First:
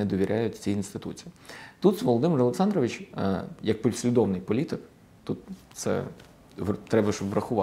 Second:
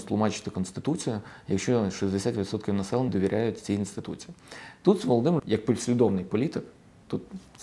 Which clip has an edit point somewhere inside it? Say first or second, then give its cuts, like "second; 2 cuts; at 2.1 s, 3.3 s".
second; 2 cuts; at 3.1 s, 5.4 s